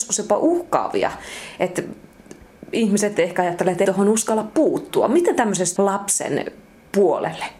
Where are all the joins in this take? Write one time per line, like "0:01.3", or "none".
0:03.8
0:05.8